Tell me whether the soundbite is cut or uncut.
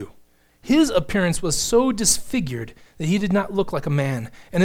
uncut